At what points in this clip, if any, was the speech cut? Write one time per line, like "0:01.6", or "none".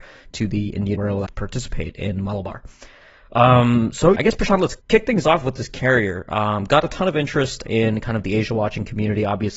0:01.0
0:01.3
0:04.2
0:04.8
0:07.7